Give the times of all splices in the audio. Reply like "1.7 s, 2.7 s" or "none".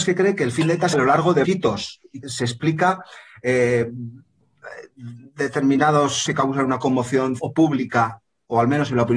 0.9 s, 1.4 s, 2.2 s, 6.3 s, 7.4 s